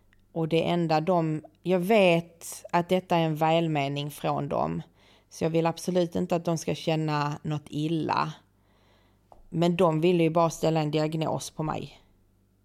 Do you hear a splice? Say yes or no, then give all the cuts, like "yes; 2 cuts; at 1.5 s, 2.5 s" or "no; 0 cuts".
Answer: no; 0 cuts